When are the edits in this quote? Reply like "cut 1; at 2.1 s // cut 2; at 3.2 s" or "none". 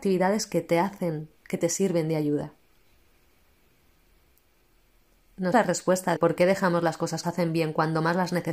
cut 1; at 1.4 s // cut 2; at 5.5 s // cut 3; at 6.2 s // cut 4; at 7.2 s